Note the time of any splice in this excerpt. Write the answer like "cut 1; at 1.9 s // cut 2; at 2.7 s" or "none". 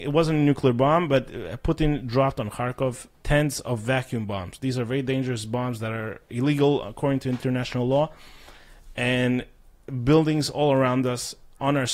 cut 1; at 3.1 s

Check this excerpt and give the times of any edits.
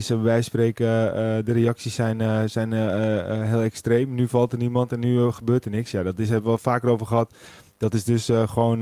none

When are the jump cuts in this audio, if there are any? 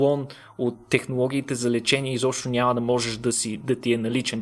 none

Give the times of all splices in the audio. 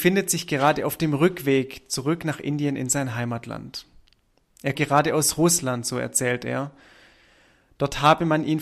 cut 1; at 4.7 s

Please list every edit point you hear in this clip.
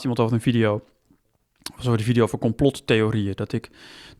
none

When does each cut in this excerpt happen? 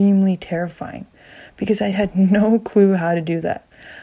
cut 1; at 1.9 s

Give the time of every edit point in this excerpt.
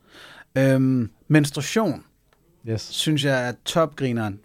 cut 1; at 1.2 s

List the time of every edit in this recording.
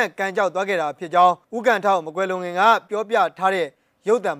cut 1; at 1.4 s

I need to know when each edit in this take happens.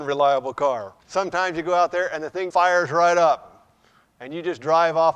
cut 1; at 1.0 s // cut 2; at 2.5 s

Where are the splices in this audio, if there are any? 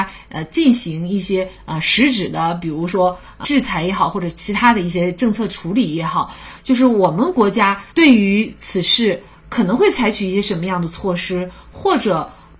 cut 1; at 7.9 s

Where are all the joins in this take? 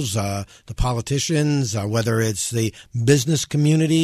none

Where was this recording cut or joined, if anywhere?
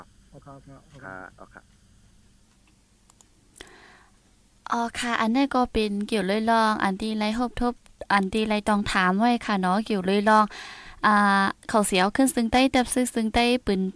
none

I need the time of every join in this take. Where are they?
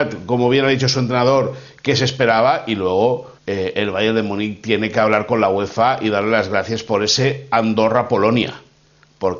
cut 1; at 3.4 s

